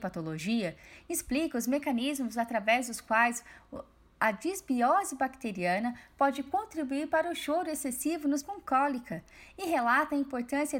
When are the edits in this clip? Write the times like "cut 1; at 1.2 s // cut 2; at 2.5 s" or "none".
cut 1; at 8.4 s